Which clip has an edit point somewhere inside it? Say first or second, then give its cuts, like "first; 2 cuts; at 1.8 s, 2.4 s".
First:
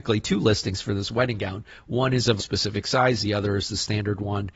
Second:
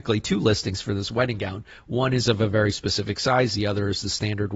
first; 1 cut; at 2.4 s